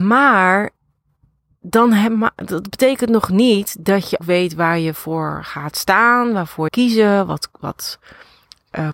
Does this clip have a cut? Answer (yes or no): yes